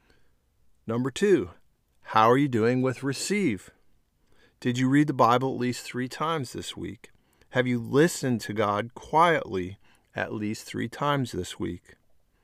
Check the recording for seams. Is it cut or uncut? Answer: uncut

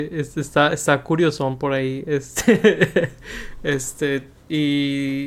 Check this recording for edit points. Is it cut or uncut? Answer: uncut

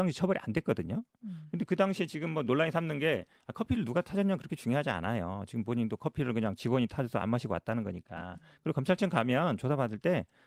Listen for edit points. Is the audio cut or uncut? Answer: uncut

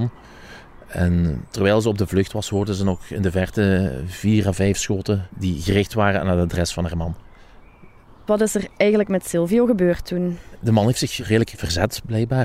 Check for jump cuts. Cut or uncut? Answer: uncut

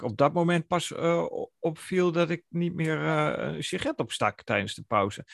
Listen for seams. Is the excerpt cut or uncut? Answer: uncut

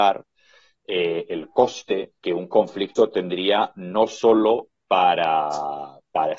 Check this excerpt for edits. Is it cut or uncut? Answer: cut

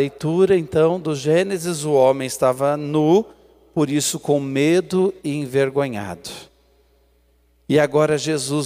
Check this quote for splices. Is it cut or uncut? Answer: uncut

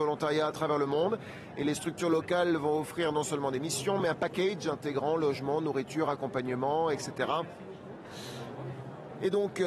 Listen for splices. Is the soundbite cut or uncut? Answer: uncut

